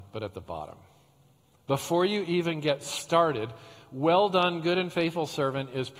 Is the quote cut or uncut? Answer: uncut